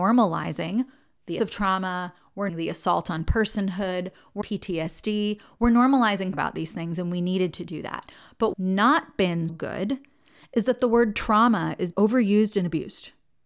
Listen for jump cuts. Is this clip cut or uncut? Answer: cut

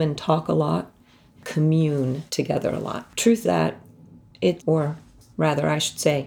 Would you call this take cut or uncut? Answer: cut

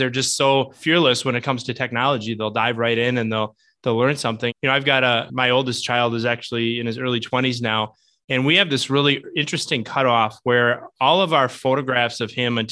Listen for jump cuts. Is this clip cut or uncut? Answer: uncut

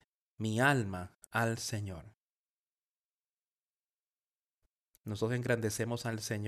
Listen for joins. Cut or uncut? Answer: uncut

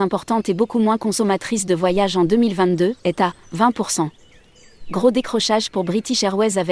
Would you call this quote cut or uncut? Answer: cut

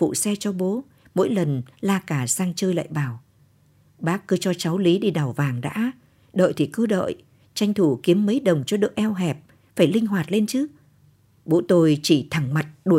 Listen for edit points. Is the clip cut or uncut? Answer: uncut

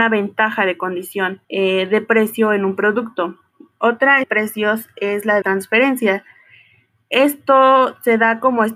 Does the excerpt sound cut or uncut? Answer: cut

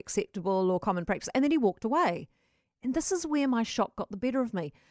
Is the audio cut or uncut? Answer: uncut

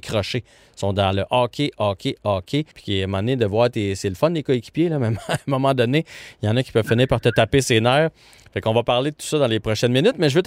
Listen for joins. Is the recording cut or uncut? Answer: cut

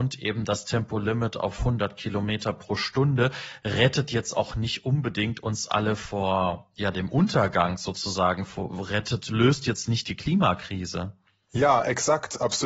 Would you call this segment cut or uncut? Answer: uncut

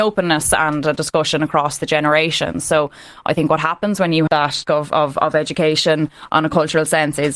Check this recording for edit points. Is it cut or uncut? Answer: cut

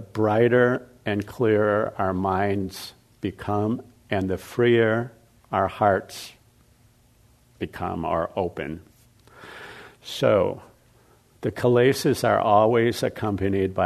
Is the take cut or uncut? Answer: cut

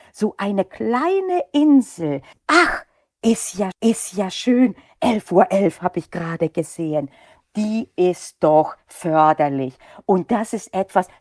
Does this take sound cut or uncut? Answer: cut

